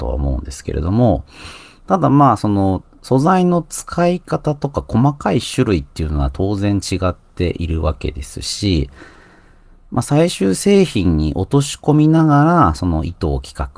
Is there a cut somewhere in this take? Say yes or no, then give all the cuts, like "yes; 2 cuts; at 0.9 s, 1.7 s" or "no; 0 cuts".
no; 0 cuts